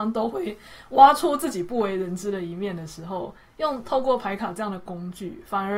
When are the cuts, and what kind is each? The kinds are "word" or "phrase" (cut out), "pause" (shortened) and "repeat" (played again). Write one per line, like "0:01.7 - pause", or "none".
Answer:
none